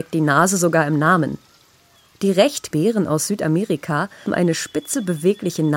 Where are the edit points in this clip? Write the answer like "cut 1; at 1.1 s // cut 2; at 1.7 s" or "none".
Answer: cut 1; at 2.7 s // cut 2; at 4.3 s